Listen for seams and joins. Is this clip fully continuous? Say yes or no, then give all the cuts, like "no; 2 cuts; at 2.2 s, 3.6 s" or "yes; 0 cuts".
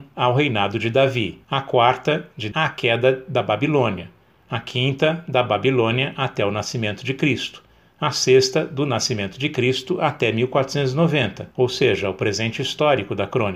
no; 3 cuts; at 1.4 s, 2.5 s, 11.5 s